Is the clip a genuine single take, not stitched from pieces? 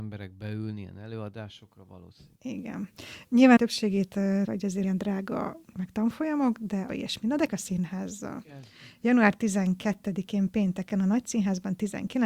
no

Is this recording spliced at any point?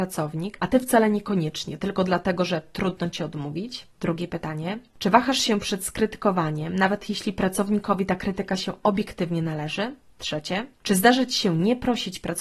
yes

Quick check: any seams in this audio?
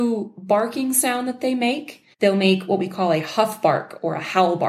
yes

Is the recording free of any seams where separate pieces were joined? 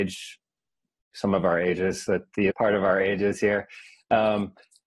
no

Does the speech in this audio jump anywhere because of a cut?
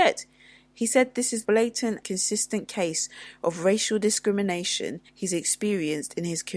yes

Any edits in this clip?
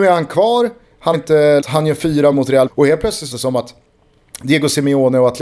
yes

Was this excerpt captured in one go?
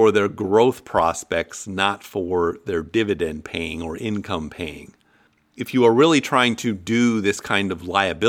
yes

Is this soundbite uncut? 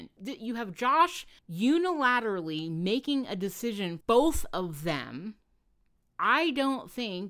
no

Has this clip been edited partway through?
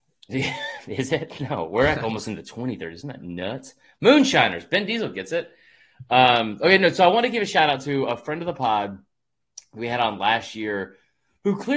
no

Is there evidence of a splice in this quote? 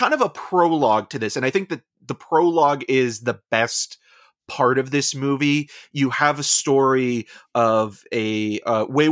no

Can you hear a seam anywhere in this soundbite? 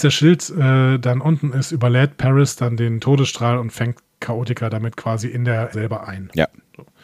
yes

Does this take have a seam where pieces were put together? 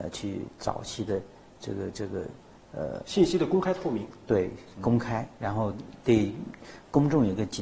no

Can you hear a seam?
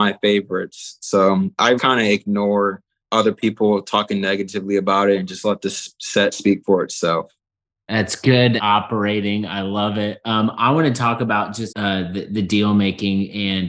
yes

